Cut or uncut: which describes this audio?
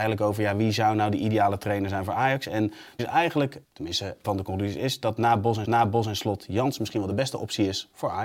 cut